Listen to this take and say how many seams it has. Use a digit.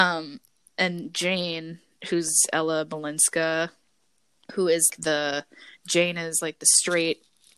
1